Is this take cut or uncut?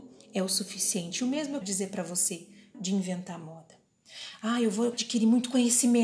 cut